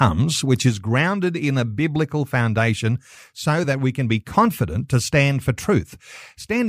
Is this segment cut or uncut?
uncut